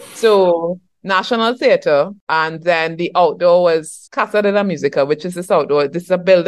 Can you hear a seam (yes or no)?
yes